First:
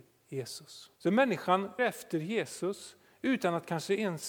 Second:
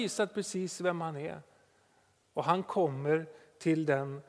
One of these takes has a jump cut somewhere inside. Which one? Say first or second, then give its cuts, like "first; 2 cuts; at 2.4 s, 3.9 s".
first; 2 cuts; at 1.0 s, 1.8 s